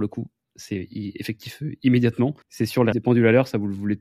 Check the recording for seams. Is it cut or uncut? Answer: cut